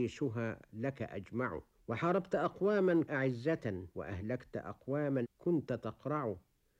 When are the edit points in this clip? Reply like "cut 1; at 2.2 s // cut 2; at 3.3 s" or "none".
cut 1; at 1.7 s // cut 2; at 3.0 s // cut 3; at 3.9 s // cut 4; at 5.2 s

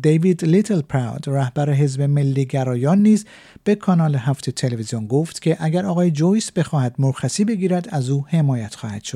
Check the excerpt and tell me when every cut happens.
none

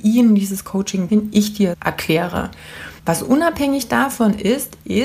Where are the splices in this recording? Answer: cut 1; at 1.1 s // cut 2; at 1.7 s // cut 3; at 3.0 s

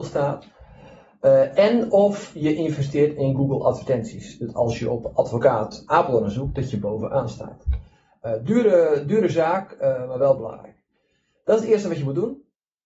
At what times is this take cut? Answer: none

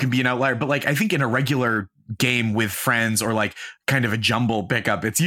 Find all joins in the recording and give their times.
none

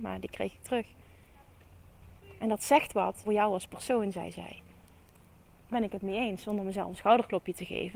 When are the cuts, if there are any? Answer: cut 1; at 3.2 s // cut 2; at 5.7 s

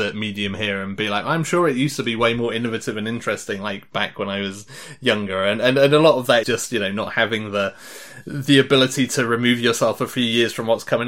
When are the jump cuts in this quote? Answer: cut 1; at 6.4 s

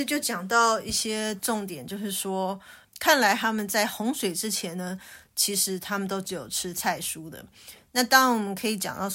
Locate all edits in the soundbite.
cut 1; at 2.8 s

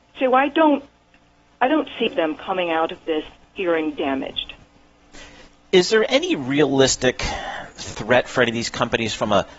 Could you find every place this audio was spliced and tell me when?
cut 1; at 2.1 s

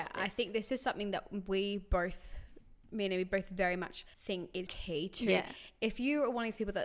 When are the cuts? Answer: cut 1; at 4.1 s // cut 2; at 4.7 s

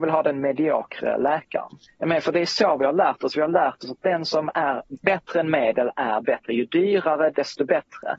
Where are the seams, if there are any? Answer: none

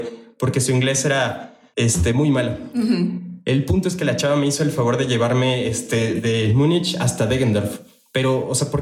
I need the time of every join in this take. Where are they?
none

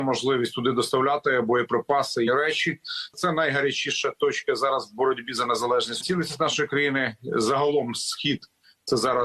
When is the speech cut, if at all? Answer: cut 1; at 2.3 s // cut 2; at 6.0 s

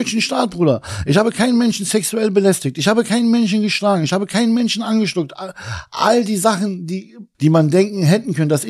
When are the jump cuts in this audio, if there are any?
cut 1; at 7.3 s

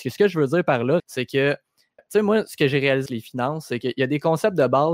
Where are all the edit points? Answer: cut 1; at 1.0 s // cut 2; at 2.0 s // cut 3; at 3.1 s

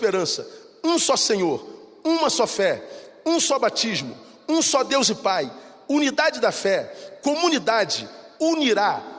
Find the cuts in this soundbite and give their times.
none

